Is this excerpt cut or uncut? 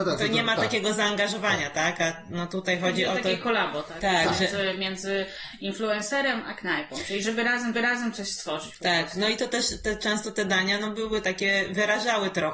cut